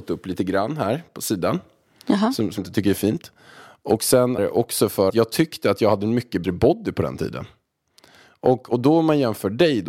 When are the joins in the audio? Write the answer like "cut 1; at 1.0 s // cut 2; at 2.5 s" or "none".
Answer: cut 1; at 2.6 s // cut 2; at 4.4 s // cut 3; at 5.1 s // cut 4; at 6.4 s